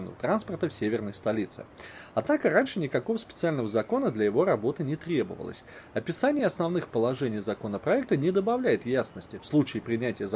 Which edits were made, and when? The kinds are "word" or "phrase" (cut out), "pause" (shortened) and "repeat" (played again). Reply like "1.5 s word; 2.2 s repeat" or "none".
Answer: none